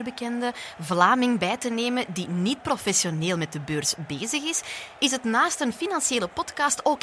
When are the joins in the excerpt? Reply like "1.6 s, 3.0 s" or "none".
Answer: none